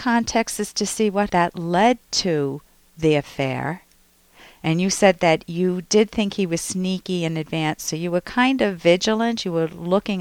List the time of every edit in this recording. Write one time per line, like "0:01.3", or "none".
0:01.3

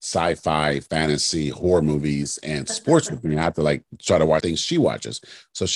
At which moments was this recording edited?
0:04.4

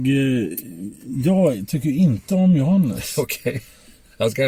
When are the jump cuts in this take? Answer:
none

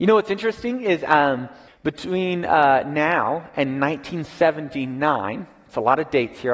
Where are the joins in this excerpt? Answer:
0:01.7

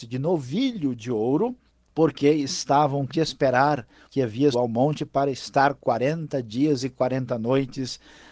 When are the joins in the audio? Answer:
0:03.1
0:04.1
0:04.5

